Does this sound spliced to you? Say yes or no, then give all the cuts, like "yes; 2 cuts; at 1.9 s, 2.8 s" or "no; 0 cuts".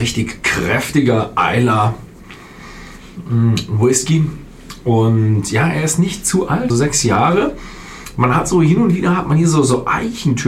yes; 1 cut; at 6.7 s